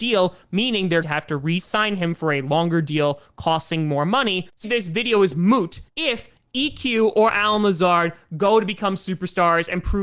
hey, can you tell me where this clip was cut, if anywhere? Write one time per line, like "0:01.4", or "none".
0:01.0
0:04.6
0:05.9

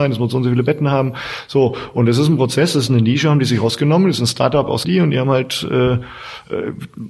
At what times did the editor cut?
0:04.8

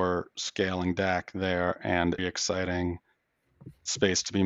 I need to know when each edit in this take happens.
0:02.2

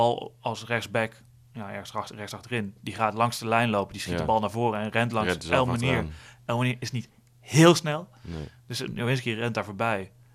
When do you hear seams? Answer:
none

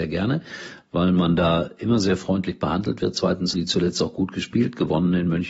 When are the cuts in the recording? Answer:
0:03.5

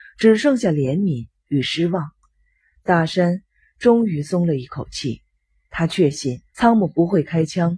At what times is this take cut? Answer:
0:06.5

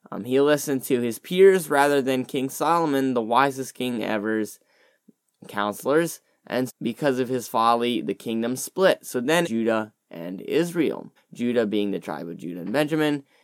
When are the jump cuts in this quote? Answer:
0:06.7
0:09.4
0:11.2

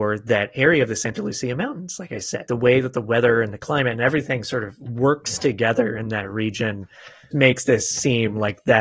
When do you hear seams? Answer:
0:02.5
0:07.3

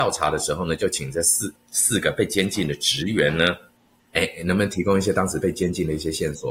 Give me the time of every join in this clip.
none

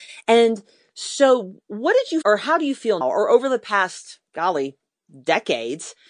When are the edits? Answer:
0:02.2
0:03.0

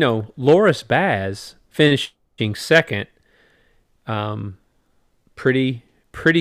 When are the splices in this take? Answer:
none

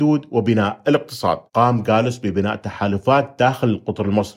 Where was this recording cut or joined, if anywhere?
0:01.5

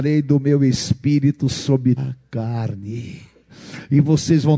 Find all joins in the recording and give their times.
0:02.0

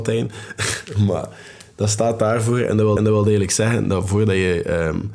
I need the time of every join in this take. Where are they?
0:03.0

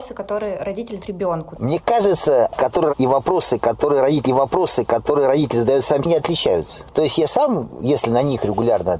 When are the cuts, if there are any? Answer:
0:01.0
0:02.6
0:02.9
0:04.2
0:06.0

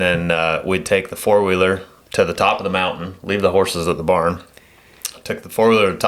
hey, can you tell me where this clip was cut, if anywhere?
none

